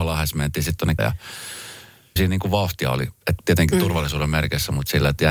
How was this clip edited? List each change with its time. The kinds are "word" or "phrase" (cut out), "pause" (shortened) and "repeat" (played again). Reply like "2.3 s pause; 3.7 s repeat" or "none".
1.0 s word; 2.2 s word; 3.4 s word